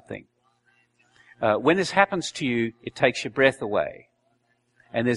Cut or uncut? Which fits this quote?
uncut